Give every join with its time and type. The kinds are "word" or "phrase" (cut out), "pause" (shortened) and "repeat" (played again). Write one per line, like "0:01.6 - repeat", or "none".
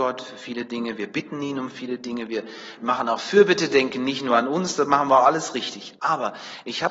none